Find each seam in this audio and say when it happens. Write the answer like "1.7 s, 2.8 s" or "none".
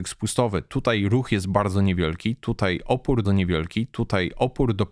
3.2 s